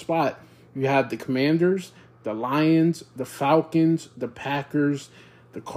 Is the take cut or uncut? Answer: uncut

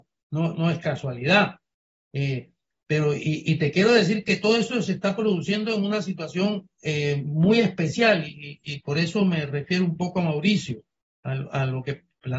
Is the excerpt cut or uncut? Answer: uncut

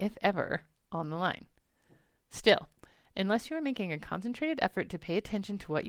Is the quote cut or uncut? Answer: uncut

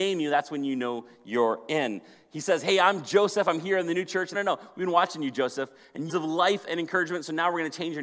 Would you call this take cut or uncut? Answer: cut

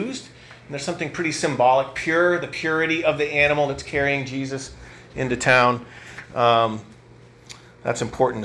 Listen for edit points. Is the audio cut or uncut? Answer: uncut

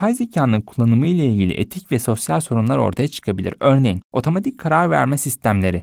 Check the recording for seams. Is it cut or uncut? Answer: uncut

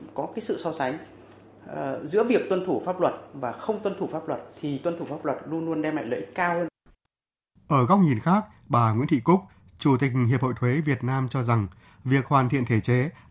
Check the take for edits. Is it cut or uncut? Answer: uncut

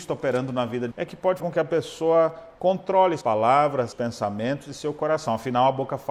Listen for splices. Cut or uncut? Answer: cut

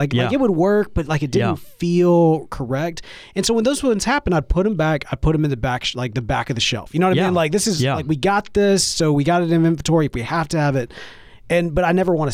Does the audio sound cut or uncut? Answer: uncut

